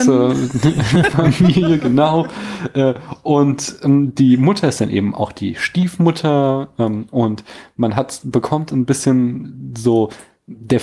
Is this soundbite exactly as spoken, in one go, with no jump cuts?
yes; 0 cuts

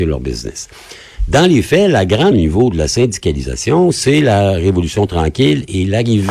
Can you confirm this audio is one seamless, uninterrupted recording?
no; 1 cut; at 2.3 s

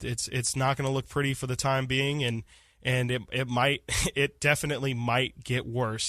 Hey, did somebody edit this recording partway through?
no; 0 cuts

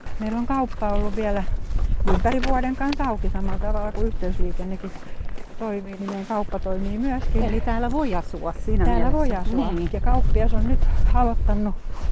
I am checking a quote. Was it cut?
no; 0 cuts

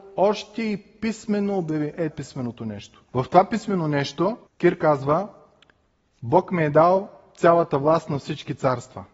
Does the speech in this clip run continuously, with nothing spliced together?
no; 3 cuts; at 2.1 s, 3.1 s, 4.5 s

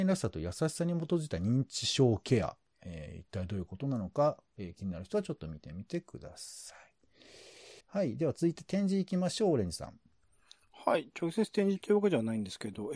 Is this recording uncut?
no; 1 cut; at 7.8 s

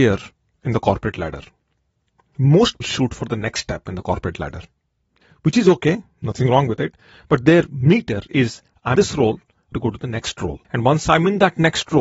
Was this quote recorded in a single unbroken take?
no; 4 cuts; at 2.8 s, 9.0 s, 9.7 s, 10.6 s

